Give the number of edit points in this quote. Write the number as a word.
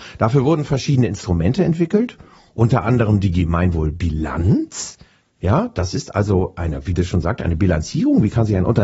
zero